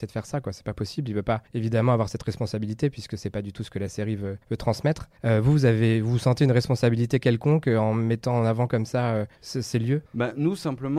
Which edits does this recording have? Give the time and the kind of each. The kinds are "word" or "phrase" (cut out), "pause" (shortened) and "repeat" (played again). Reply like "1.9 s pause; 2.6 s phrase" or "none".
1.5 s pause; 4.4 s pause; 5.2 s pause; 9.3 s pause; 10.1 s pause